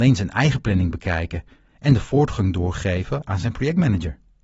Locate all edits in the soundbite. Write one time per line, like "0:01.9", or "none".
none